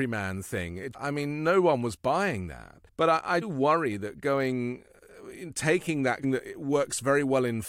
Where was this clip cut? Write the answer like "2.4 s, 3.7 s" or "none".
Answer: 0.9 s, 2.9 s, 3.4 s, 6.2 s